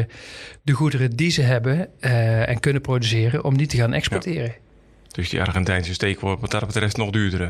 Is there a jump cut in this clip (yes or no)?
no